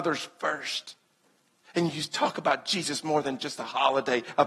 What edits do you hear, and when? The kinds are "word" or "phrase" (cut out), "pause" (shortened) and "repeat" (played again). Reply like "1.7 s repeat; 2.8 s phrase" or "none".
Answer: none